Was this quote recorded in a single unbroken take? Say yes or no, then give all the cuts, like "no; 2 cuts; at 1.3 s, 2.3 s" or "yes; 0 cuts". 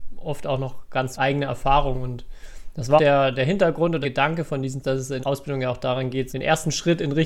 no; 6 cuts; at 1.1 s, 3.0 s, 4.0 s, 4.8 s, 5.2 s, 6.3 s